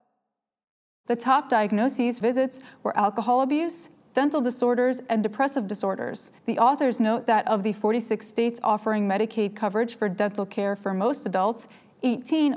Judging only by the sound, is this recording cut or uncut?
cut